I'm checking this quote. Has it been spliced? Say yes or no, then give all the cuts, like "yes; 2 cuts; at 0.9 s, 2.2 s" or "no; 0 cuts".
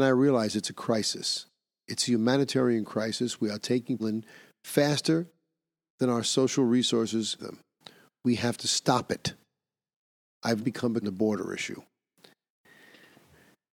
yes; 4 cuts; at 4.0 s, 7.4 s, 10.6 s, 11.0 s